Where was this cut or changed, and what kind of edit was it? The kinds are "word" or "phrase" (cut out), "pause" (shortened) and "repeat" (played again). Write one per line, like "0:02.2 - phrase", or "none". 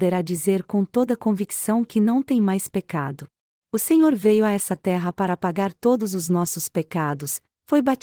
0:03.4 - pause